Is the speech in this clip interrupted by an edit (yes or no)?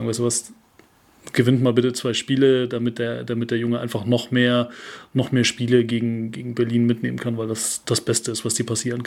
no